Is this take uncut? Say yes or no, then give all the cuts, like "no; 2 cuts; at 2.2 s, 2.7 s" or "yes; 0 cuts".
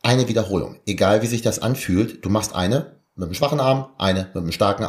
yes; 0 cuts